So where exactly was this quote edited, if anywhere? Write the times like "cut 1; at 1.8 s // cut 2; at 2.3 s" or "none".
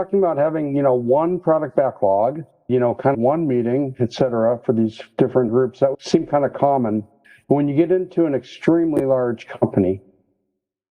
cut 1; at 2.7 s // cut 2; at 3.1 s // cut 3; at 5.5 s // cut 4; at 5.9 s

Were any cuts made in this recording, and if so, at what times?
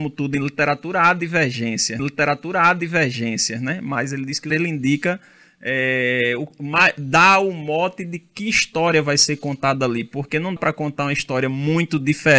cut 1; at 2.0 s // cut 2; at 4.5 s // cut 3; at 10.6 s

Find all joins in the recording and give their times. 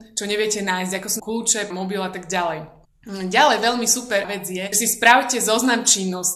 cut 1; at 1.2 s // cut 2; at 1.7 s // cut 3; at 2.8 s // cut 4; at 4.2 s // cut 5; at 4.7 s

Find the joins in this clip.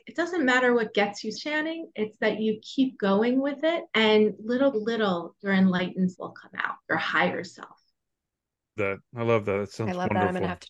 cut 1; at 1.3 s // cut 2; at 3.9 s // cut 3; at 4.7 s // cut 4; at 6.1 s // cut 5; at 6.8 s // cut 6; at 8.8 s

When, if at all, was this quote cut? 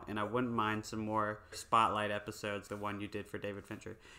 cut 1; at 1.5 s // cut 2; at 2.7 s

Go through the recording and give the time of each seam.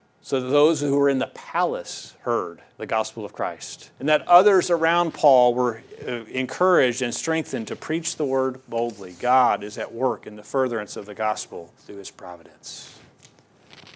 cut 1; at 2.7 s // cut 2; at 3.9 s // cut 3; at 11.8 s

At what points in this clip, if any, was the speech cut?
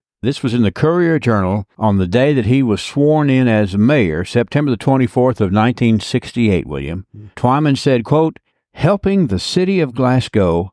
cut 1; at 1.7 s // cut 2; at 7.3 s // cut 3; at 8.5 s

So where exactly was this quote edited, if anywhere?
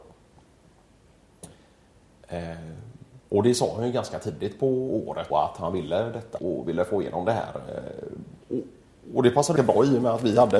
cut 1; at 3.2 s // cut 2; at 5.3 s // cut 3; at 6.4 s // cut 4; at 8.4 s // cut 5; at 9.6 s

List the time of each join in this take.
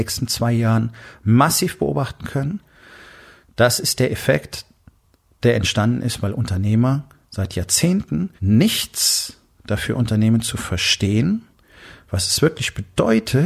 cut 1; at 8.4 s

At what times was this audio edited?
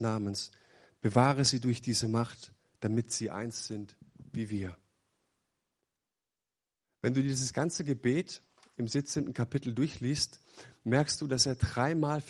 none

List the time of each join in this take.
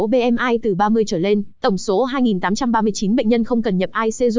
cut 1; at 1.5 s

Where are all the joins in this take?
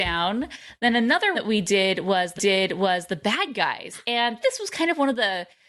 cut 1; at 1.3 s // cut 2; at 2.4 s // cut 3; at 4.4 s

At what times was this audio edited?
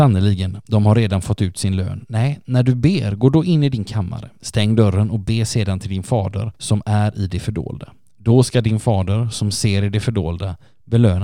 none

